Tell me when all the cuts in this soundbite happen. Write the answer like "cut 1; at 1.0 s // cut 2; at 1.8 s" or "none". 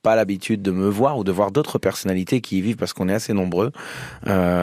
none

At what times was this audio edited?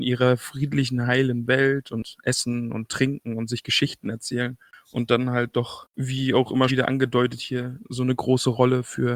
cut 1; at 6.7 s

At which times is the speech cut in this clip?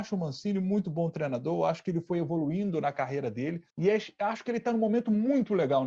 cut 1; at 3.7 s

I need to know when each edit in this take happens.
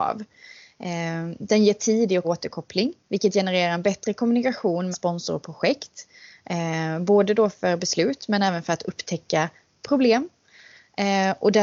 cut 1; at 2.2 s // cut 2; at 3.0 s // cut 3; at 4.9 s

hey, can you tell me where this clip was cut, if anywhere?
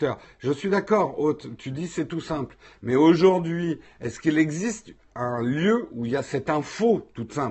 none

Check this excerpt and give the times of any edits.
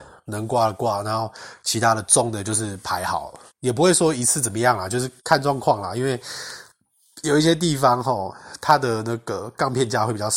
cut 1; at 3.5 s // cut 2; at 5.2 s

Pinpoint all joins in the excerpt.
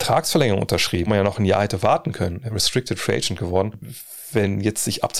cut 1; at 1.1 s // cut 2; at 2.5 s

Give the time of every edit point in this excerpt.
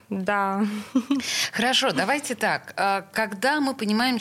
none

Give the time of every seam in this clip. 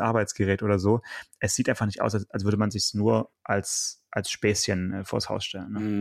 cut 1; at 3.3 s

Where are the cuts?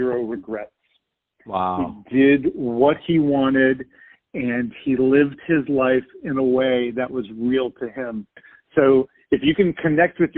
none

